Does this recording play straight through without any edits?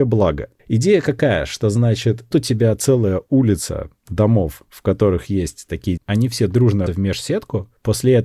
no; 3 cuts; at 2.3 s, 6.0 s, 6.9 s

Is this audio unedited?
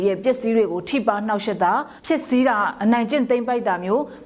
no; 1 cut; at 2.0 s

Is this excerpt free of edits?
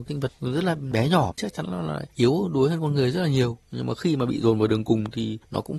yes; 0 cuts

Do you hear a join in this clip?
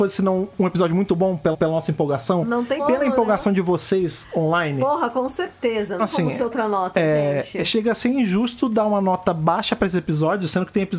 yes; 3 cuts; at 1.5 s, 2.8 s, 6.0 s

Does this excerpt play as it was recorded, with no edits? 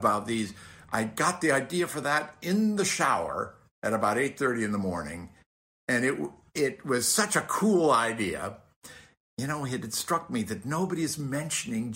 yes; 0 cuts

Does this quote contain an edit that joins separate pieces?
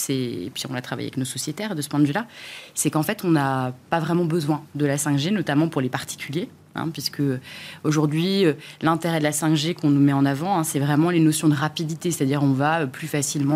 no; 0 cuts

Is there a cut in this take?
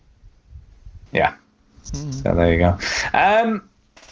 yes; 1 cut; at 1.1 s

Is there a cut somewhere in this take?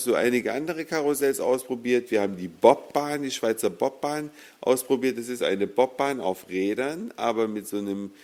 yes; 1 cut; at 5.4 s

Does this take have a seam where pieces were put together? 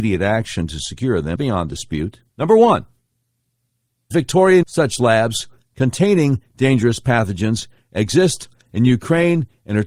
yes; 4 cuts; at 1.4 s, 2.3 s, 4.1 s, 4.6 s

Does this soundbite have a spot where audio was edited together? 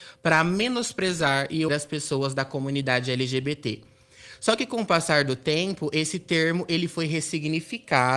yes; 1 cut; at 1.7 s

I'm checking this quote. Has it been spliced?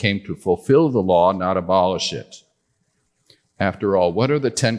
no; 0 cuts

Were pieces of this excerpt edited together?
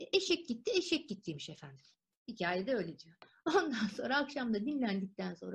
no; 0 cuts

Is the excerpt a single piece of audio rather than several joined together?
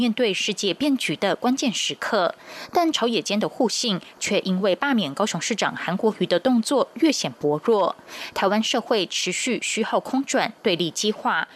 yes; 0 cuts

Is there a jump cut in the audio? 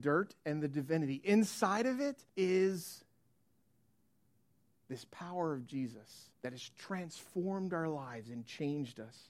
yes; 2 cuts; at 2.3 s, 6.3 s

